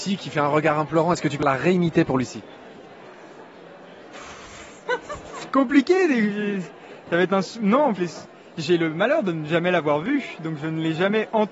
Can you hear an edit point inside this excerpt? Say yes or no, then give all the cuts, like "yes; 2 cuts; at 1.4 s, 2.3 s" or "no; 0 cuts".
yes; 2 cuts; at 1.4 s, 8.0 s